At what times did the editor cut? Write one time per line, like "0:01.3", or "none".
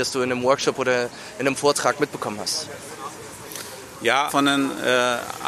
0:04.3